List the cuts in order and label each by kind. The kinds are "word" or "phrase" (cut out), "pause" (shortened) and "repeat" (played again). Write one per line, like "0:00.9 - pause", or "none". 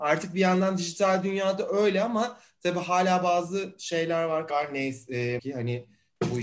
0:04.5 - word
0:05.4 - word